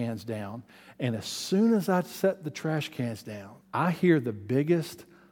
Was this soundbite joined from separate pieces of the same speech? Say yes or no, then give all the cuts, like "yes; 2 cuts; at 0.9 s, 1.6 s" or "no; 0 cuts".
yes; 1 cut; at 3.6 s